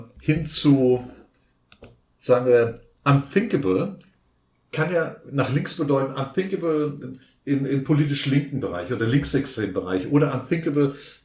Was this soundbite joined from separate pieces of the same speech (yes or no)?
no